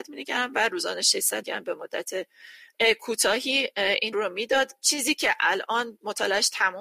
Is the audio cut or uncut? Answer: cut